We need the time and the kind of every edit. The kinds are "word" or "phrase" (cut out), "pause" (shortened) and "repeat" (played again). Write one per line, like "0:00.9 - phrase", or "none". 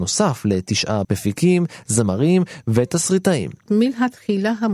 0:01.0 - word